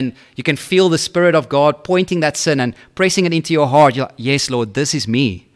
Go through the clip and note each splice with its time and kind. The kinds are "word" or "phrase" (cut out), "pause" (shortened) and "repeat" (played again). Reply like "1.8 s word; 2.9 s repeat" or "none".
none